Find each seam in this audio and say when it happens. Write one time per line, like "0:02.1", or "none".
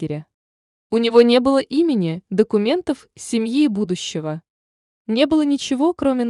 none